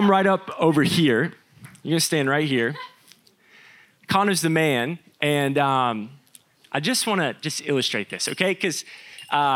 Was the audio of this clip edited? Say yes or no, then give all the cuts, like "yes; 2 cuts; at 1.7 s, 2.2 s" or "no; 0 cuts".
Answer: no; 0 cuts